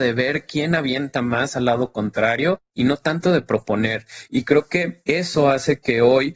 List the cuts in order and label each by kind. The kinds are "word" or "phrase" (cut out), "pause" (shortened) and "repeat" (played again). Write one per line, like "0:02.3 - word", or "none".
none